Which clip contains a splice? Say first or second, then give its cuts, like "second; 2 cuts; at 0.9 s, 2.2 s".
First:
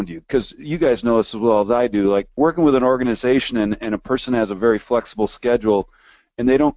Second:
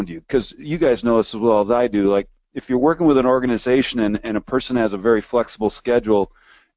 first; 1 cut; at 2.4 s